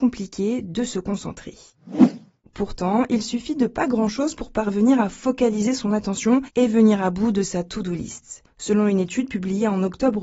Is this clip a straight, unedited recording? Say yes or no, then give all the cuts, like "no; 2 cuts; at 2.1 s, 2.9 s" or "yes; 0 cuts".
yes; 0 cuts